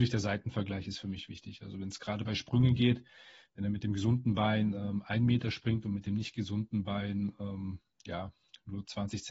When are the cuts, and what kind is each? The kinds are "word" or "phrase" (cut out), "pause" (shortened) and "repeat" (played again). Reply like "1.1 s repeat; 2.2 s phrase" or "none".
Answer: none